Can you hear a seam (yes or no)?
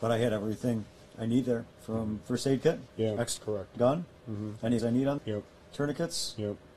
yes